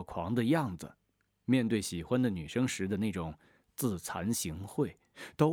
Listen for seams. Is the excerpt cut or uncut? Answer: cut